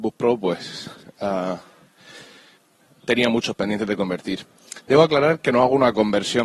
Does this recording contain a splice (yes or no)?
no